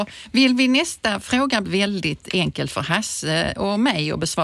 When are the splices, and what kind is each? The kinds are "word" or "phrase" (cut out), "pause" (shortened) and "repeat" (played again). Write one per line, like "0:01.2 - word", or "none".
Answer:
0:01.6 - word